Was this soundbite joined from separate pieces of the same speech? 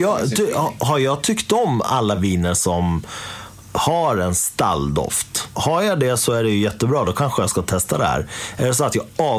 no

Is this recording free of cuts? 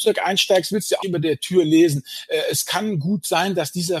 no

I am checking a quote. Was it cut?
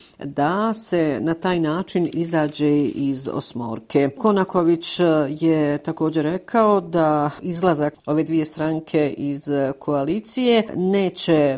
no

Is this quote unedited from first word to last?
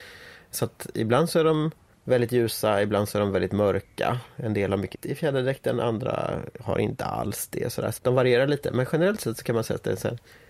no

